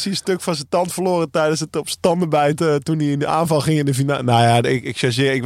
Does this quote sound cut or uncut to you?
uncut